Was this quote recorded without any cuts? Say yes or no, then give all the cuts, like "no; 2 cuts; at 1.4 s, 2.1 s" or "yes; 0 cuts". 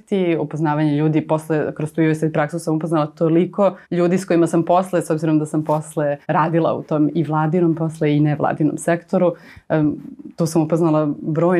no; 2 cuts; at 3.8 s, 6.2 s